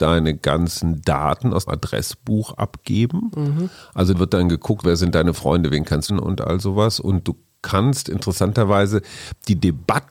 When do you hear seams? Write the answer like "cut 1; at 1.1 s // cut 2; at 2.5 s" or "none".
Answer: cut 1; at 1.7 s // cut 2; at 4.1 s // cut 3; at 4.8 s // cut 4; at 6.1 s

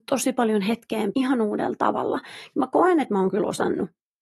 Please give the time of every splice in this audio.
cut 1; at 1.1 s

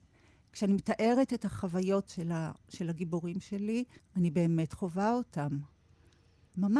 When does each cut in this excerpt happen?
cut 1; at 2.1 s // cut 2; at 4.0 s

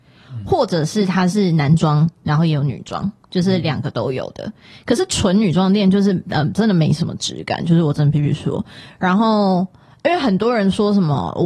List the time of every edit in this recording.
none

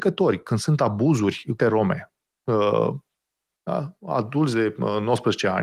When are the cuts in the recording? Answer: cut 1; at 1.6 s // cut 2; at 3.6 s

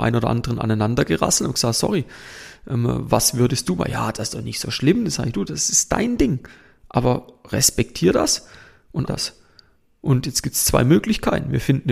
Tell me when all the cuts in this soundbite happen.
cut 1; at 9.1 s

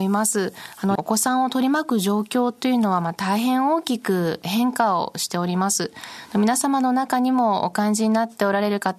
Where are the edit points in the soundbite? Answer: cut 1; at 1.0 s

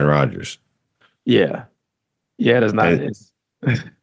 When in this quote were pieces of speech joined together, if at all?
none

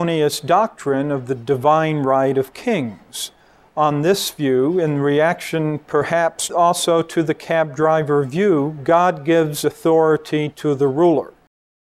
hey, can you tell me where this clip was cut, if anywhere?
none

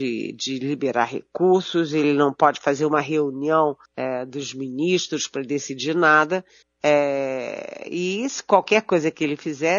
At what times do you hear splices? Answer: cut 1; at 3.8 s // cut 2; at 6.6 s

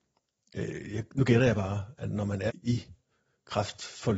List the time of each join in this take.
cut 1; at 2.5 s

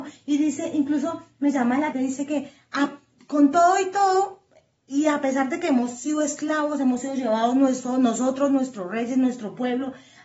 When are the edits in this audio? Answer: cut 1; at 1.9 s

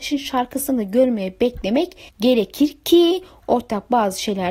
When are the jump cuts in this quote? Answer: cut 1; at 2.1 s

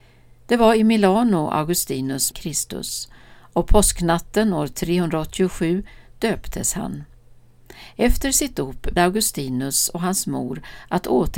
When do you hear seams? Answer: cut 1; at 2.3 s // cut 2; at 9.0 s

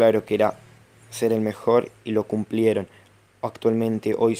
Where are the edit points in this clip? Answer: none

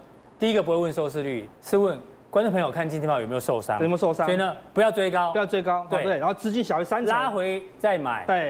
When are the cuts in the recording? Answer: cut 1; at 1.5 s

